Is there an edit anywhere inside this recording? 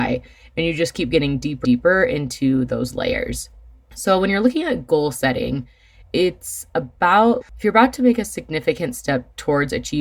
yes; 3 cuts; at 1.6 s, 6.0 s, 7.4 s

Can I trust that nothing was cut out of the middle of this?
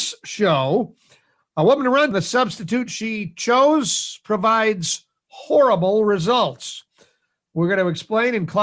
no; 1 cut; at 2.1 s

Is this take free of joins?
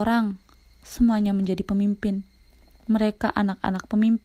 yes; 0 cuts

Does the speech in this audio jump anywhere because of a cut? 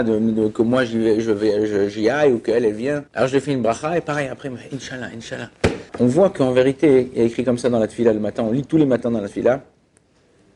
yes; 2 cuts; at 3.1 s, 5.9 s

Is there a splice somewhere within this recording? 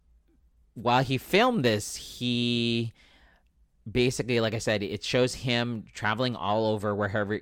no; 0 cuts

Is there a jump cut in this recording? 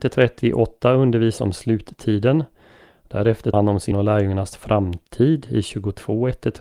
yes; 3 cuts; at 1.4 s, 3.5 s, 3.9 s

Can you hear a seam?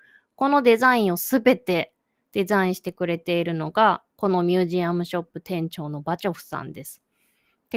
no; 0 cuts

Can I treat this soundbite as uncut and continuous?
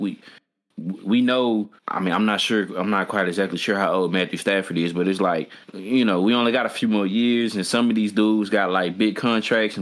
no; 2 cuts; at 1.8 s, 5.6 s

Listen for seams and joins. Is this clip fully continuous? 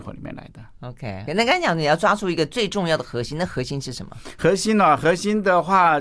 no; 1 cut; at 1.3 s

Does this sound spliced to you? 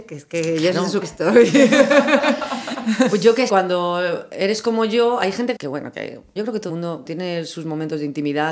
yes; 6 cuts; at 1.0 s, 3.5 s, 5.6 s, 6.4 s, 6.7 s, 7.0 s

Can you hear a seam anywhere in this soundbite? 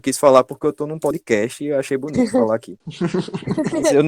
no; 0 cuts

